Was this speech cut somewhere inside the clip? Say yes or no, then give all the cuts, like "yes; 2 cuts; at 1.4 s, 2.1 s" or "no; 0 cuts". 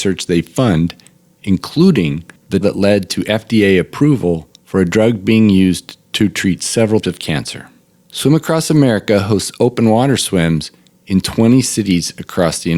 yes; 3 cuts; at 2.6 s, 4.6 s, 7.0 s